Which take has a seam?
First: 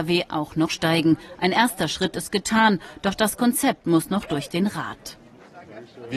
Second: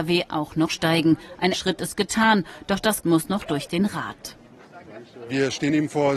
second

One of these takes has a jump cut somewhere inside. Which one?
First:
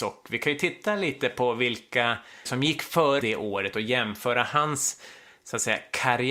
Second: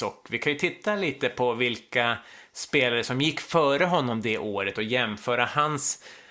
first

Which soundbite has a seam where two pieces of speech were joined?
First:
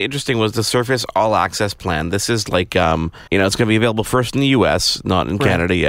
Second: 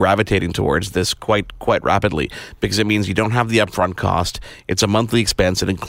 first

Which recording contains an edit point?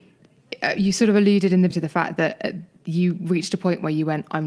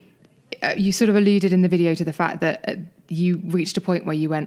first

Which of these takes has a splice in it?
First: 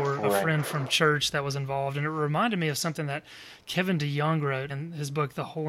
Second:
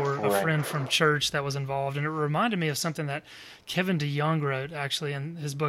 first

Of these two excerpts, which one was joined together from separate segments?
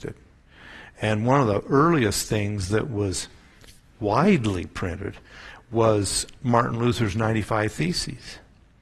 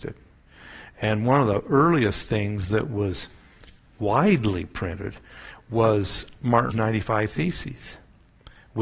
second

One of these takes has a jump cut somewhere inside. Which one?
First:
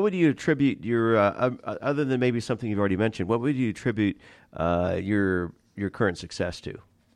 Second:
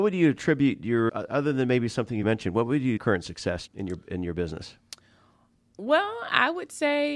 second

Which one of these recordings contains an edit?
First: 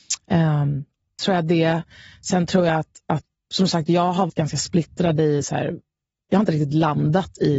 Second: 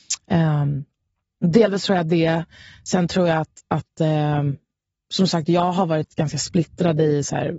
first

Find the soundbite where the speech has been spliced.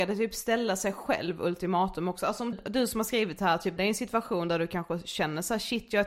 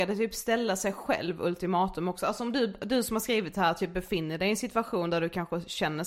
first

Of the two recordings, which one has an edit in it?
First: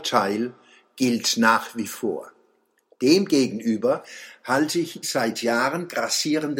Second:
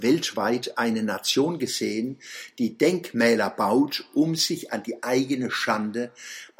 first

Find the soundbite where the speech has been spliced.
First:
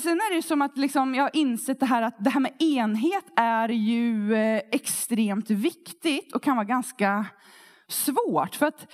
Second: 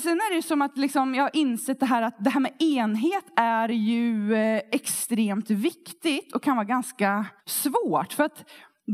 second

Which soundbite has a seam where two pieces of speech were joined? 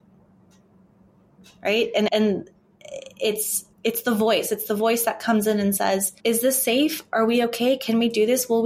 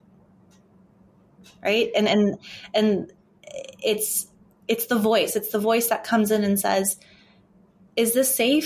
first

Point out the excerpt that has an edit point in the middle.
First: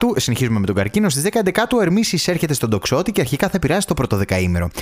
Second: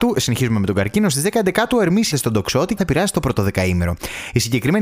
second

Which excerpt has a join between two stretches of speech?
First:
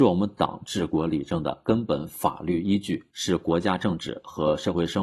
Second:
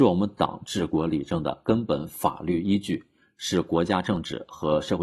first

